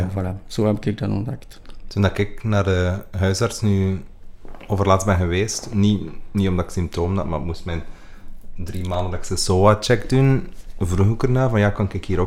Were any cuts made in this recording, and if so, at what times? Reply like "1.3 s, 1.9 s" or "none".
none